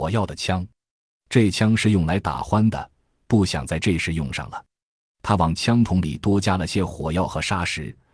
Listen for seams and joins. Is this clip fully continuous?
yes; 0 cuts

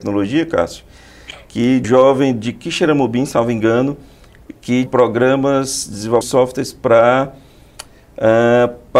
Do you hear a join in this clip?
yes; 3 cuts; at 1.8 s, 4.9 s, 6.2 s

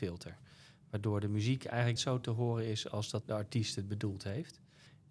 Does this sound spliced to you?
yes; 2 cuts; at 2.0 s, 3.2 s

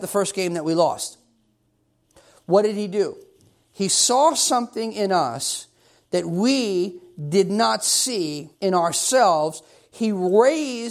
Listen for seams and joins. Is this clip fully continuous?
no; 1 cut; at 8.5 s

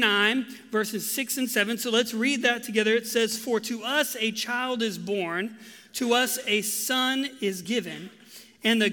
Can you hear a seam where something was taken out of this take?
no; 0 cuts

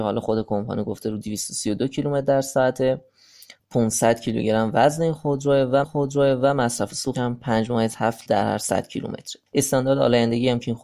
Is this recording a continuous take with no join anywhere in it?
no; 5 cuts; at 3.6 s, 5.8 s, 7.1 s, 8.3 s, 9.5 s

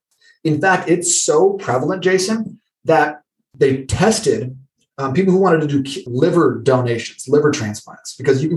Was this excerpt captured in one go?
yes; 0 cuts

